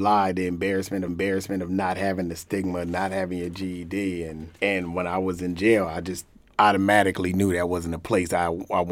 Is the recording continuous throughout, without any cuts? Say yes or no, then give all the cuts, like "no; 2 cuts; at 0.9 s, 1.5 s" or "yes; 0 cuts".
no; 3 cuts; at 1.1 s, 4.6 s, 6.4 s